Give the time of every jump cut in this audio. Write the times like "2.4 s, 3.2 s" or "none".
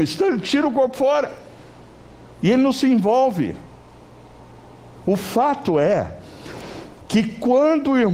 2.3 s